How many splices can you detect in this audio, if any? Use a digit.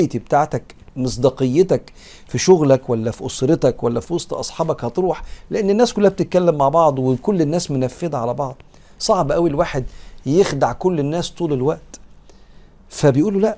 0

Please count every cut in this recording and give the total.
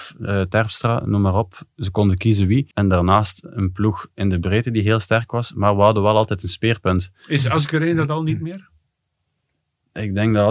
1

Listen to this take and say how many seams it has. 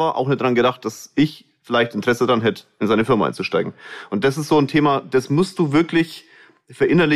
0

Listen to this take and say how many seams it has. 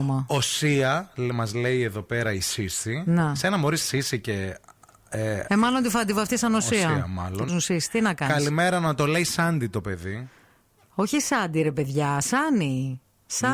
2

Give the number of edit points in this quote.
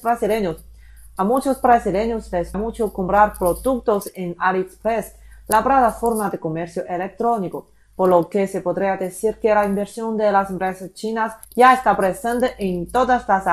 2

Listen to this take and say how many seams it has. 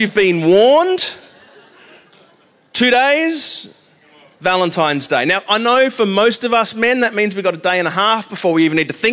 0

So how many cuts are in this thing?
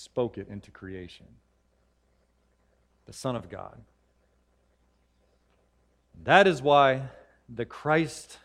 0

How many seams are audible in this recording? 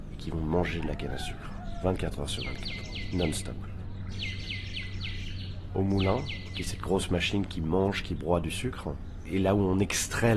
0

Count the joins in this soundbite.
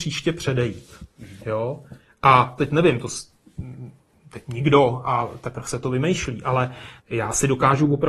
3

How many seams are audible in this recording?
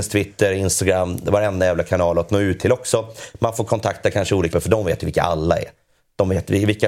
1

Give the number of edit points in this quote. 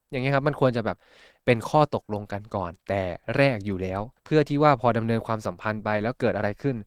1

